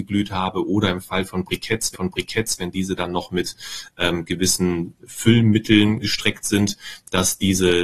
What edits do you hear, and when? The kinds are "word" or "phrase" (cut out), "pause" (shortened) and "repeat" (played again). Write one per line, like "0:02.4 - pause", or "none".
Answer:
0:01.9 - repeat
0:06.0 - word